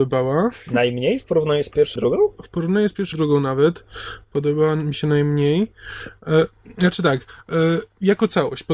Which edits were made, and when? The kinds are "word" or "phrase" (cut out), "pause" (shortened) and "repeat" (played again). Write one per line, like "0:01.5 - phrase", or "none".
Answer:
0:02.0 - word
0:03.1 - word